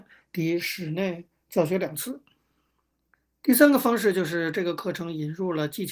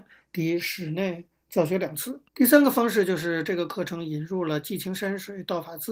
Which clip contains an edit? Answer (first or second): second